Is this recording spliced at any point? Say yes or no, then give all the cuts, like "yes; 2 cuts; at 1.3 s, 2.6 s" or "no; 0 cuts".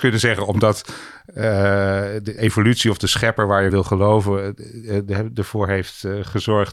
yes; 2 cuts; at 2.4 s, 3.7 s